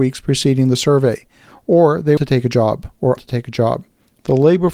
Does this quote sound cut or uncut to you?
cut